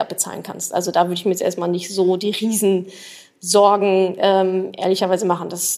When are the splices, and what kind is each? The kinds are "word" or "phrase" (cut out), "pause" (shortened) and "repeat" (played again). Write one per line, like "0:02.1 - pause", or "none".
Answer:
none